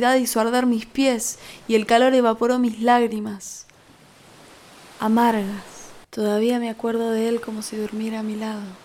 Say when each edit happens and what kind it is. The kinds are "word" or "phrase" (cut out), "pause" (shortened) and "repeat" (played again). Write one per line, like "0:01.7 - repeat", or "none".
0:06.0 - pause